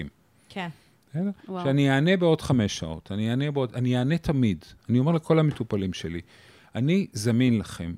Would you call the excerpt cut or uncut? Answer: uncut